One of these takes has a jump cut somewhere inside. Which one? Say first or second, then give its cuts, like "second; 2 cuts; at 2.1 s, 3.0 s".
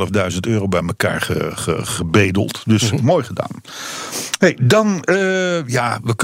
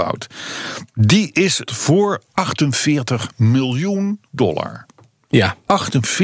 second; 2 cuts; at 1.7 s, 4.2 s